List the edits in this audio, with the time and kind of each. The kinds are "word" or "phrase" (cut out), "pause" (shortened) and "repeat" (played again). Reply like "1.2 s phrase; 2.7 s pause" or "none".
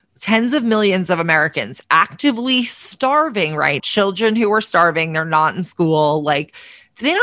3.8 s word